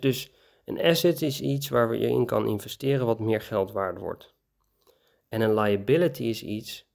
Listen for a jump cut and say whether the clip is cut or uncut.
uncut